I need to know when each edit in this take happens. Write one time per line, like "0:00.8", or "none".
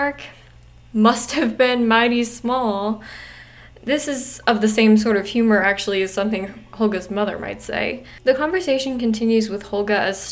none